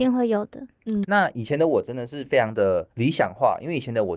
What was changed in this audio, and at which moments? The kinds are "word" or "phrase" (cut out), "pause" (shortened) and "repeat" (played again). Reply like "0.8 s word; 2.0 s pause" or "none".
1.0 s word